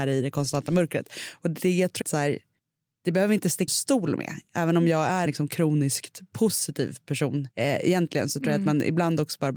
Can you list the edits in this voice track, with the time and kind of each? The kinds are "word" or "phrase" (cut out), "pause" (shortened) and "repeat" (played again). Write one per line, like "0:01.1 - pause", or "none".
0:02.0 - word
0:02.6 - pause
0:03.7 - word
0:05.3 - word
0:07.5 - pause